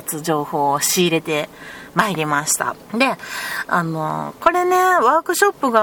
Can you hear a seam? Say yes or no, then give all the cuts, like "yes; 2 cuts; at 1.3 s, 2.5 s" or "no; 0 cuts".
yes; 1 cut; at 2.8 s